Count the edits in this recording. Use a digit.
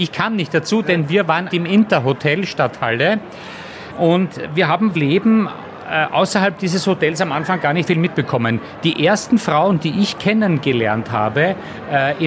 3